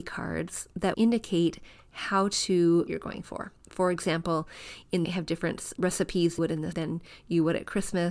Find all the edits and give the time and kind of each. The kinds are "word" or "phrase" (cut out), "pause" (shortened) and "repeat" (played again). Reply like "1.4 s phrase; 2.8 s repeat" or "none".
0.9 s word; 2.9 s phrase; 5.0 s phrase; 5.8 s word; 6.4 s word; 6.7 s word